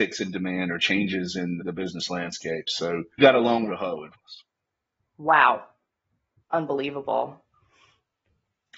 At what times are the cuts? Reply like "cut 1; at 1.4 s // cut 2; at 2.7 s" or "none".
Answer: cut 1; at 1.6 s // cut 2; at 3.2 s // cut 3; at 3.7 s // cut 4; at 4.1 s // cut 5; at 6.4 s

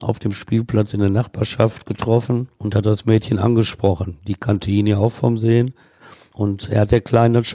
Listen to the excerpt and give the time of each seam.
none

